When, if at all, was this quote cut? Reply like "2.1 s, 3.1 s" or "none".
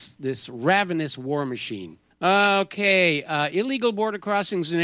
2.1 s